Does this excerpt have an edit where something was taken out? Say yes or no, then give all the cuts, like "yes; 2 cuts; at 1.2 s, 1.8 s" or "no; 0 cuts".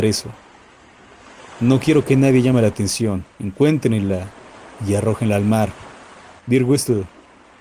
yes; 2 cuts; at 3.3 s, 6.4 s